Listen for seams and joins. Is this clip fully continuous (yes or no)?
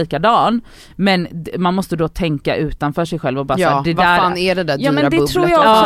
yes